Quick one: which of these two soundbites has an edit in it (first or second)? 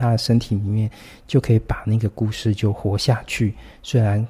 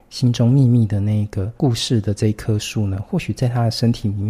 second